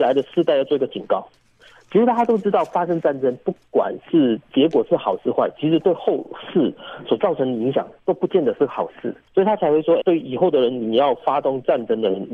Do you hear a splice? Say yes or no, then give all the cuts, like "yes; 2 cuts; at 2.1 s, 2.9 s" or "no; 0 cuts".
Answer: yes; 1 cut; at 10.0 s